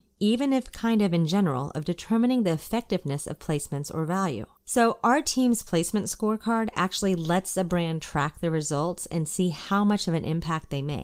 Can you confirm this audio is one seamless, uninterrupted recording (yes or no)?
no